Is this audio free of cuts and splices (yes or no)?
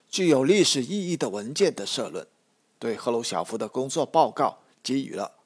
yes